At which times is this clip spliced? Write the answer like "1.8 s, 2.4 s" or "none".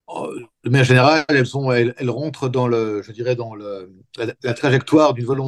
none